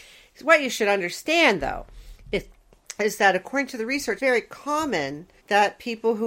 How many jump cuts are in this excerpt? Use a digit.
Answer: 2